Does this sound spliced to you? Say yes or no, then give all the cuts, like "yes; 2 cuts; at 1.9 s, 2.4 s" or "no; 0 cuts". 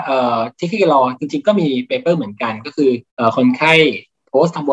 yes; 1 cut; at 3.1 s